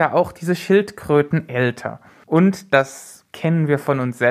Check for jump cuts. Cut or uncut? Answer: uncut